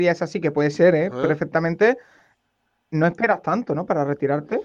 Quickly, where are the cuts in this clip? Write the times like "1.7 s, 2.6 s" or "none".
none